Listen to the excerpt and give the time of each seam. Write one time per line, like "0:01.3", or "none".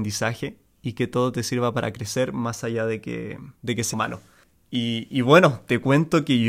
0:03.6
0:03.9
0:04.4